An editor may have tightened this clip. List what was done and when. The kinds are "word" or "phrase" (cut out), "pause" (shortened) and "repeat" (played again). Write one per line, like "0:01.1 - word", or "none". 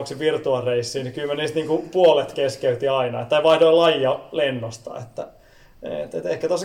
none